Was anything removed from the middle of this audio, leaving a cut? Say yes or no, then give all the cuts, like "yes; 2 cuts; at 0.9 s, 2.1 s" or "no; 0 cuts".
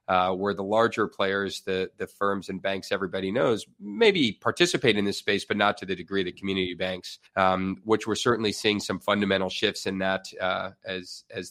yes; 1 cut; at 7.3 s